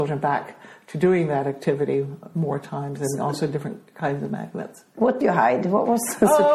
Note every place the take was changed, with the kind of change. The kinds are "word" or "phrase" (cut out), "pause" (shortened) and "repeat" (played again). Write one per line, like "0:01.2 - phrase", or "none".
0:05.2 - word